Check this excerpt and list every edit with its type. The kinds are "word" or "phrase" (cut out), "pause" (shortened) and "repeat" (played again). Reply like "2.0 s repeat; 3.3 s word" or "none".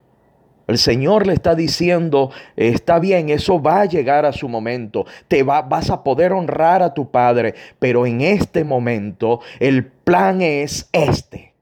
none